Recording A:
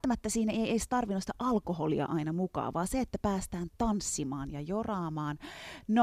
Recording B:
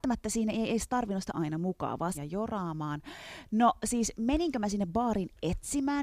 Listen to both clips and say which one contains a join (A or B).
B